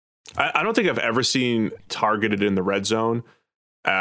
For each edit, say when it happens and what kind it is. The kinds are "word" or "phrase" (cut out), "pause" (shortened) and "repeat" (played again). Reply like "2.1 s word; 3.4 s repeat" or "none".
1.9 s word